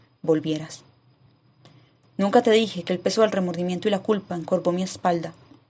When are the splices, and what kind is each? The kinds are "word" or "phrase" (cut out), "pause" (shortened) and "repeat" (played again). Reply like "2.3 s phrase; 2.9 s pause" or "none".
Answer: none